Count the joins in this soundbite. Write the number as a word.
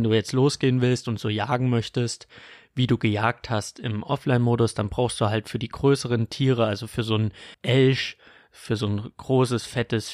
one